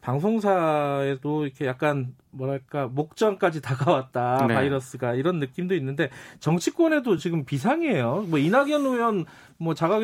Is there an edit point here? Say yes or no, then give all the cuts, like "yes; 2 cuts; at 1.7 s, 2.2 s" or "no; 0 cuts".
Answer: no; 0 cuts